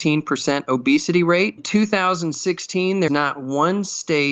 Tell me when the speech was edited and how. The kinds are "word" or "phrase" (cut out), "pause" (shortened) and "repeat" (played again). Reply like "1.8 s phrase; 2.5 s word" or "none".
1.6 s word; 3.1 s word